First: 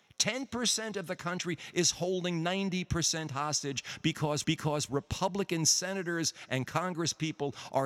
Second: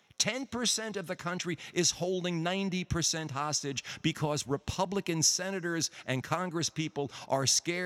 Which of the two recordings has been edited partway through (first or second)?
first